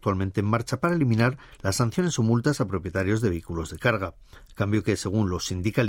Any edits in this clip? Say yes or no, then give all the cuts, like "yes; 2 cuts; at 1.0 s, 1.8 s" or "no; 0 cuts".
no; 0 cuts